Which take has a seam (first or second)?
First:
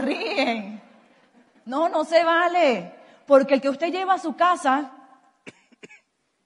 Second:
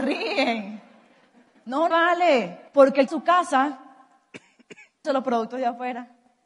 second